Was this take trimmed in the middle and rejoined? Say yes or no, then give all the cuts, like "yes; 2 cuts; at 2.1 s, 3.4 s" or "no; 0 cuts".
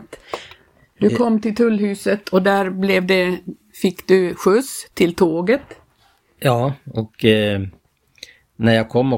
no; 0 cuts